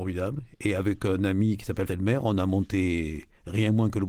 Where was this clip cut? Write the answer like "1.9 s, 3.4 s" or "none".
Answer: 1.9 s